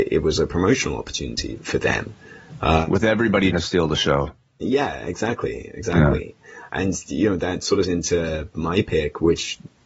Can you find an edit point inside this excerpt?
yes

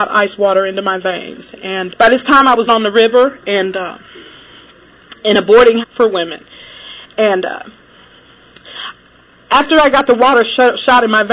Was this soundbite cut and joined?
yes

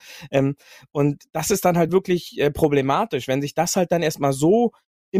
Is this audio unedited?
yes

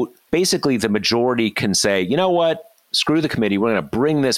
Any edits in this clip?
no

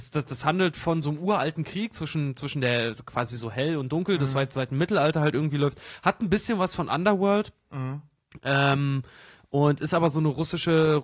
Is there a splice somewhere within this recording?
no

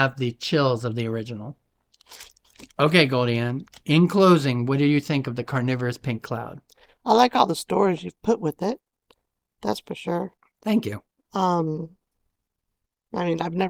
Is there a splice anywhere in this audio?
no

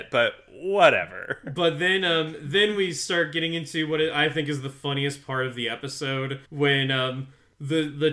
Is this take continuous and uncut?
no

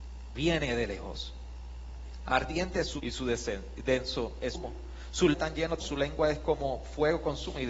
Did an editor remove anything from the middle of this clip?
yes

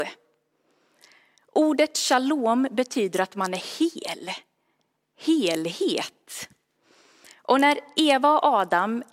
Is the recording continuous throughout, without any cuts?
yes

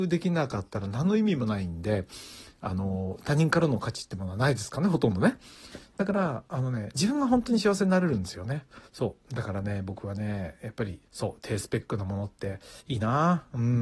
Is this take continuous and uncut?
no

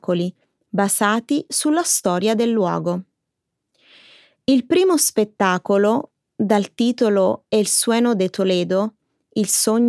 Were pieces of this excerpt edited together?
no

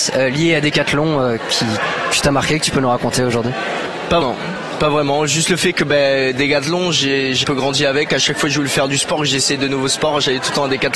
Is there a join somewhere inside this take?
yes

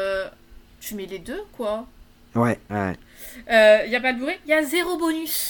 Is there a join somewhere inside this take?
no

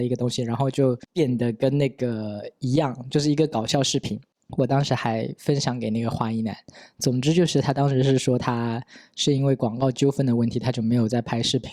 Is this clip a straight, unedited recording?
yes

